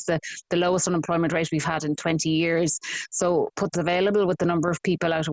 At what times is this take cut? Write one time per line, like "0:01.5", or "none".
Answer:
0:03.7